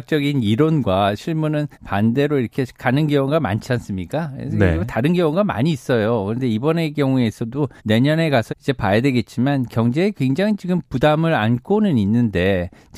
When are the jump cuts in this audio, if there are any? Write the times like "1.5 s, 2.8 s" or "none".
1.7 s, 2.7 s, 3.7 s, 7.8 s, 8.5 s